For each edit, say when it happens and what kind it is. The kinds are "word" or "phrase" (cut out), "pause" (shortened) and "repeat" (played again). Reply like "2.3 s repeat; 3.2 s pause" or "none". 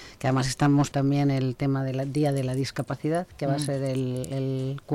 0.9 s word